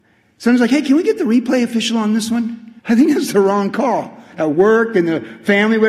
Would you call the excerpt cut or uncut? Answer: cut